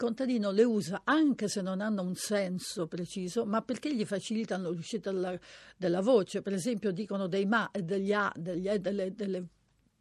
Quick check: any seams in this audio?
no; 0 cuts

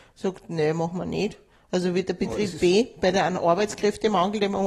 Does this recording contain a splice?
no; 0 cuts

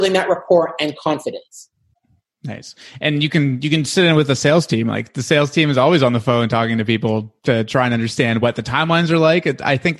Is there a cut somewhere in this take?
no; 0 cuts

